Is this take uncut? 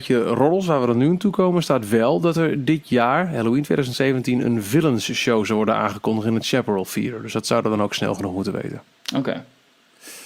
yes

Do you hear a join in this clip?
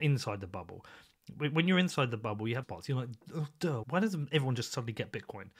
yes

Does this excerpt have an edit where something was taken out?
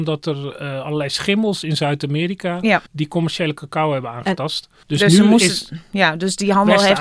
yes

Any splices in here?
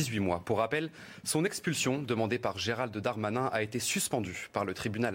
no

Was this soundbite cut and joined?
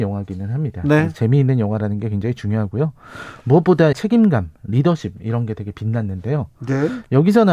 yes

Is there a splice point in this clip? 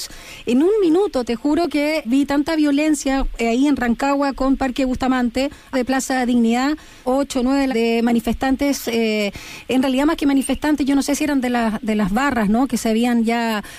yes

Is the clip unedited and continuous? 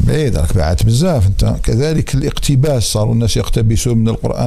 yes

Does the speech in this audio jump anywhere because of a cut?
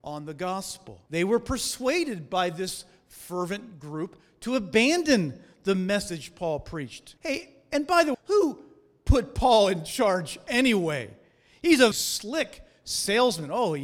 yes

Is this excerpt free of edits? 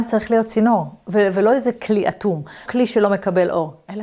no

